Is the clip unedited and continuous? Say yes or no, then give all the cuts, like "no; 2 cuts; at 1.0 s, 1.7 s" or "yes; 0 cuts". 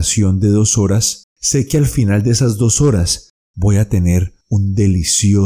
no; 2 cuts; at 1.3 s, 4.4 s